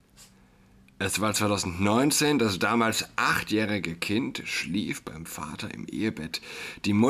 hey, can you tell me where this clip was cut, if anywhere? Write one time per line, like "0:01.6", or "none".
none